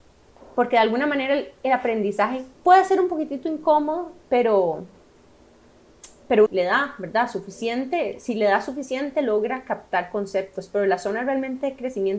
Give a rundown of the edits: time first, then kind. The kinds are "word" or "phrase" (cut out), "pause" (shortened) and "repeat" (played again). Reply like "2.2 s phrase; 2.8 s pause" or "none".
2.5 s pause; 6.5 s phrase